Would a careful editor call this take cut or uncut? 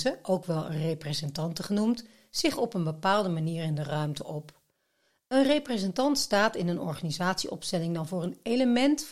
uncut